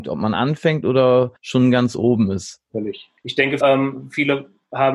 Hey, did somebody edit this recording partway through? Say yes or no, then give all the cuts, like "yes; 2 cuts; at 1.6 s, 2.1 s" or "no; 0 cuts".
yes; 3 cuts; at 1.4 s, 3.2 s, 3.6 s